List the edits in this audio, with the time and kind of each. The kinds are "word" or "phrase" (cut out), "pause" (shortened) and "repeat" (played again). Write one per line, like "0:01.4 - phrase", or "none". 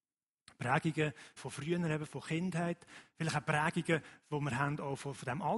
0:01.4 - word
0:02.1 - word